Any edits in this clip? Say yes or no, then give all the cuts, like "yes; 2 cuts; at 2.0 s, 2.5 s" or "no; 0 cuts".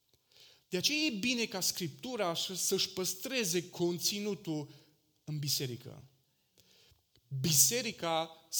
no; 0 cuts